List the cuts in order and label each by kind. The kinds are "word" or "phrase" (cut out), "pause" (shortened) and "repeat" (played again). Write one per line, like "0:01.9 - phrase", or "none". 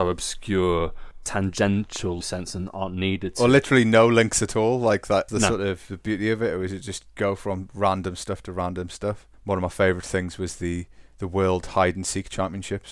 0:02.2 - phrase
0:05.3 - word